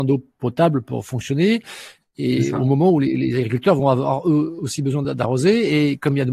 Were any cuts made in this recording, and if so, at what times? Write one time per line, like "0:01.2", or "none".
none